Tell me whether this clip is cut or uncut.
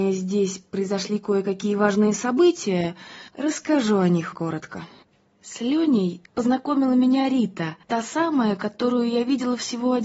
cut